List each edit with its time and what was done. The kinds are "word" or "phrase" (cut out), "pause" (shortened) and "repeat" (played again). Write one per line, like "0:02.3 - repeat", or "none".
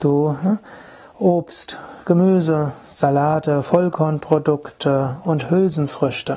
none